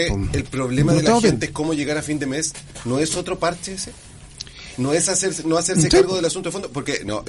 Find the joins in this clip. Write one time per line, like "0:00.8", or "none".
none